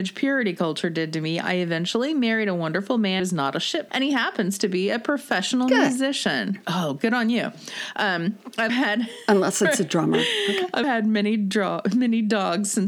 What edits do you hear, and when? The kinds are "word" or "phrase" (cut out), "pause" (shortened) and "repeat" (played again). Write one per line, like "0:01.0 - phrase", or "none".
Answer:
0:03.2 - word
0:03.9 - word
0:08.7 - word
0:10.8 - word